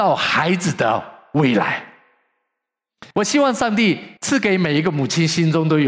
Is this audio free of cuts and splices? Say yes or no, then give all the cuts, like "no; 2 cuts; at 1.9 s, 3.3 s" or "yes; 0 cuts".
no; 2 cuts; at 3.1 s, 4.2 s